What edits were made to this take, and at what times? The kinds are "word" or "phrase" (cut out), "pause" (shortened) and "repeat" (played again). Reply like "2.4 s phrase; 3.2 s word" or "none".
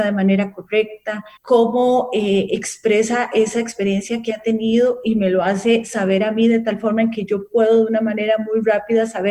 1.4 s pause